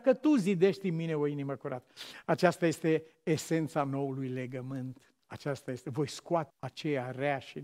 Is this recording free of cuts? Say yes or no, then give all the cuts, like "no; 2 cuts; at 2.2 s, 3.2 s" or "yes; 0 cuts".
no; 2 cuts; at 5.2 s, 6.5 s